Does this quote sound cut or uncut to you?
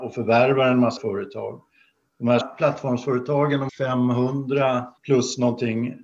cut